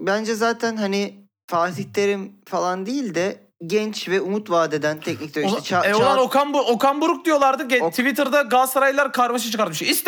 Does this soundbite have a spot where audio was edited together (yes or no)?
no